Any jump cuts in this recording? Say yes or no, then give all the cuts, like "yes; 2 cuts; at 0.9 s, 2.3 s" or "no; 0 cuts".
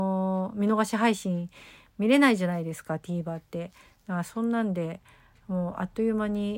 no; 0 cuts